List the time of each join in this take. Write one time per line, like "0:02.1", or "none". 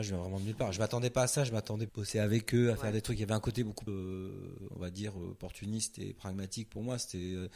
0:01.9
0:03.9